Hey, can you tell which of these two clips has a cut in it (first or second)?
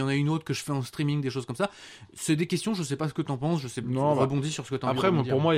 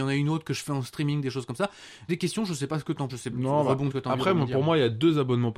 second